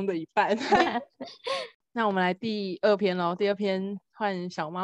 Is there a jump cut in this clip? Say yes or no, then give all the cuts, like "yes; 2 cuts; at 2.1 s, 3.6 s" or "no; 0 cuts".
no; 0 cuts